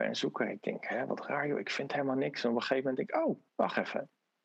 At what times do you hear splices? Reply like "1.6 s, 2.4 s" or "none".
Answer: 3.5 s